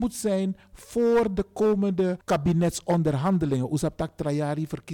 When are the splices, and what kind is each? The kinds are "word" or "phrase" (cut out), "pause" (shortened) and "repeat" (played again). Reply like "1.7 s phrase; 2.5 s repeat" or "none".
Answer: none

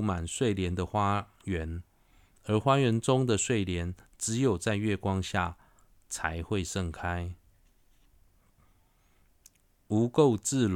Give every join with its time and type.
none

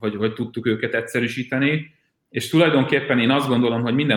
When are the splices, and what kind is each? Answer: none

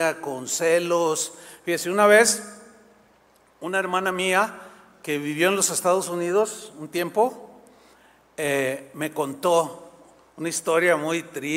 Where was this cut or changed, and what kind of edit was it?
none

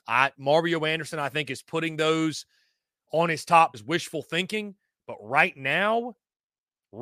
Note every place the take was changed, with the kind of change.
3.7 s word

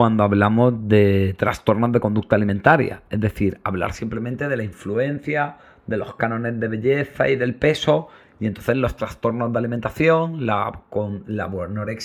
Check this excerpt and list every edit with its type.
none

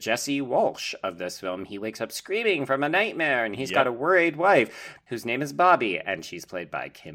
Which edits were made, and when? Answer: none

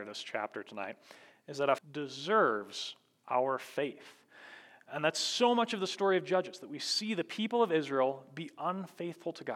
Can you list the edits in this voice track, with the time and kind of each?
1.8 s phrase

